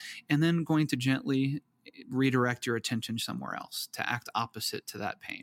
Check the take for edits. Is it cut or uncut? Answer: uncut